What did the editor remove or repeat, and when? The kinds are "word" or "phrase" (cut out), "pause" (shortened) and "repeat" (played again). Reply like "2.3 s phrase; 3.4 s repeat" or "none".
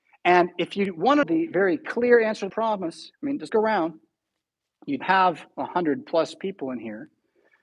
1.2 s word; 2.5 s word; 3.1 s word; 3.5 s word; 5.0 s word